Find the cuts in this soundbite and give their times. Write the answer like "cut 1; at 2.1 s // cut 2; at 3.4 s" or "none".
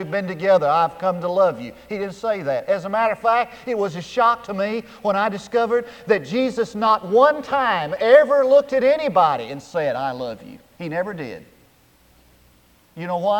none